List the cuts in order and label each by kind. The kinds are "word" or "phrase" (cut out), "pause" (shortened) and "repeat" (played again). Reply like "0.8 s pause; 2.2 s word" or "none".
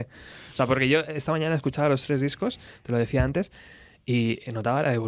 none

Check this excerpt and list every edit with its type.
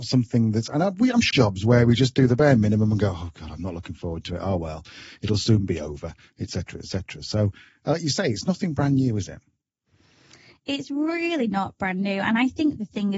1.3 s phrase

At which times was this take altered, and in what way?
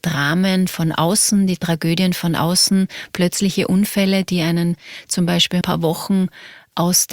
5.6 s phrase

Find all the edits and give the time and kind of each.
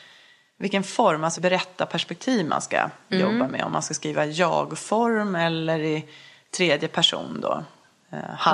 1.4 s word

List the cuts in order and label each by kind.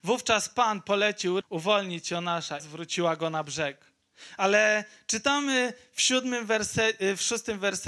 1.4 s word; 2.6 s phrase

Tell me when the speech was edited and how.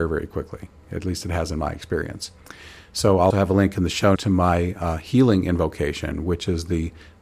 3.3 s word; 4.1 s word

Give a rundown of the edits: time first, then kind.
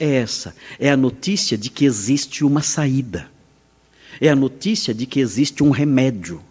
none

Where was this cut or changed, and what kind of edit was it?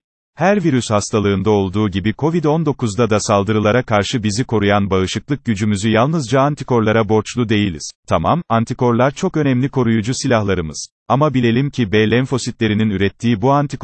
8.0 s pause; 11.0 s pause

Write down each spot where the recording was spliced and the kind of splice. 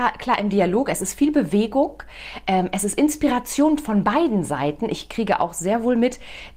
none

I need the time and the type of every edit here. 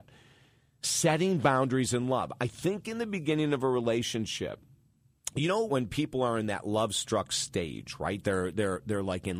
5.7 s word

